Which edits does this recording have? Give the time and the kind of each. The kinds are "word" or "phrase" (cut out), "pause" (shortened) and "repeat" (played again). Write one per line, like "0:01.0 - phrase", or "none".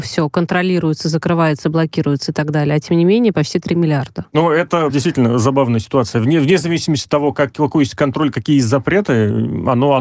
0:04.9 - word